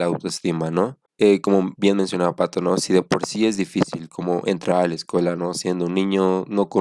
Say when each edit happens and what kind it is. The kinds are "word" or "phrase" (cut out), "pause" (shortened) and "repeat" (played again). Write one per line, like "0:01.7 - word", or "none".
0:01.1 - pause